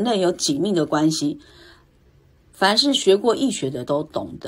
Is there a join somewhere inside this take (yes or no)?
no